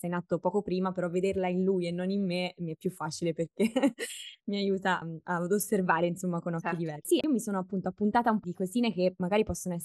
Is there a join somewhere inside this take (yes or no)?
yes